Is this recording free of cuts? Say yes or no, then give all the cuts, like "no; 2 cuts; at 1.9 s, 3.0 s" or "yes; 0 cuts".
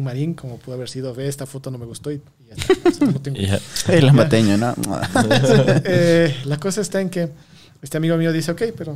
yes; 0 cuts